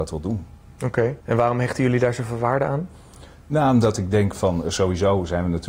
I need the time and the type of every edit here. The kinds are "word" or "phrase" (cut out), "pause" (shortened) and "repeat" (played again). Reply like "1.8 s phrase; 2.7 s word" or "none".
1.2 s pause